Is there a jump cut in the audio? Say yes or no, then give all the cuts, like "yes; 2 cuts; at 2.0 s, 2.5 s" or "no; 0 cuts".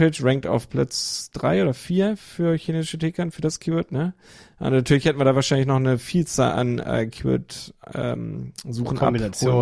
no; 0 cuts